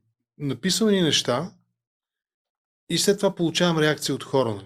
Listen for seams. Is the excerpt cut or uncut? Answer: uncut